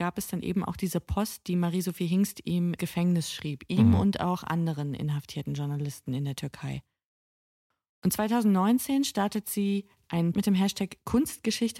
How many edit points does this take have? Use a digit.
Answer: 2